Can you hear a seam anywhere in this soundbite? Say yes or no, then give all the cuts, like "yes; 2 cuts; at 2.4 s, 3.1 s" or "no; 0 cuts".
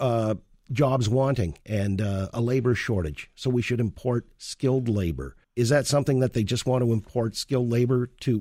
yes; 1 cut; at 5.4 s